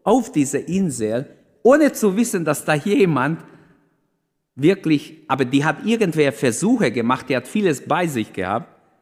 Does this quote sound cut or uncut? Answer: uncut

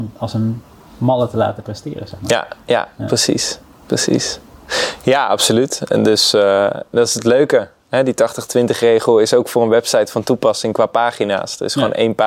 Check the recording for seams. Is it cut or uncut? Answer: uncut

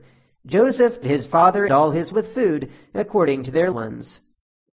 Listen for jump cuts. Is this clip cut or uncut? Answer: cut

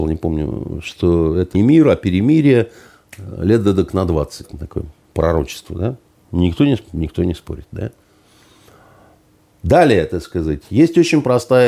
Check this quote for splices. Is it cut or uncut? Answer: cut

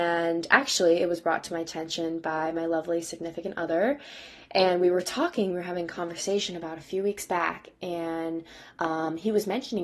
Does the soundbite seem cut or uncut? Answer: uncut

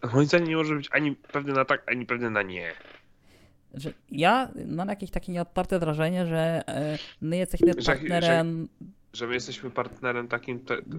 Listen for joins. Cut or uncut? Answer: cut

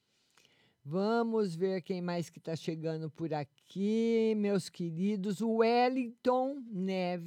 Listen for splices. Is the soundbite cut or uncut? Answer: uncut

